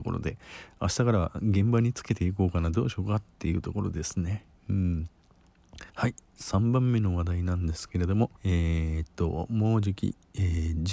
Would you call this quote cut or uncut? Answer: cut